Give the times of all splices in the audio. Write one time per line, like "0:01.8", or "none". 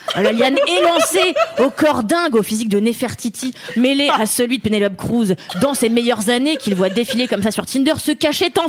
none